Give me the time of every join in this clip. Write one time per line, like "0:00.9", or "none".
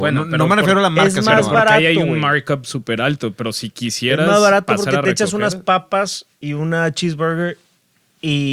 none